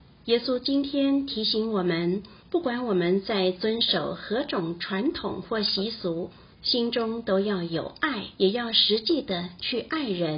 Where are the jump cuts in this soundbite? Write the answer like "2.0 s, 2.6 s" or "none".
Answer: 2.4 s, 6.5 s, 8.3 s